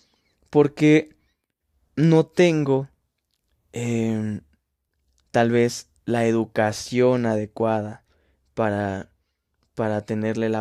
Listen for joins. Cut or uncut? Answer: uncut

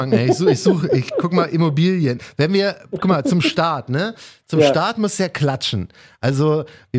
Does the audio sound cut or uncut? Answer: uncut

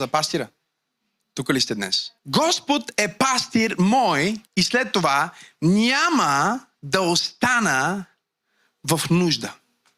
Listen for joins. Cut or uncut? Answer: cut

